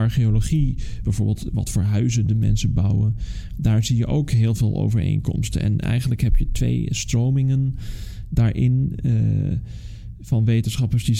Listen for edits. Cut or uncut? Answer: uncut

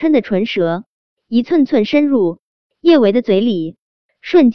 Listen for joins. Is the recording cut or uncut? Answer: uncut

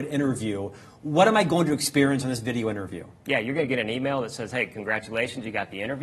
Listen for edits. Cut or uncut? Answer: uncut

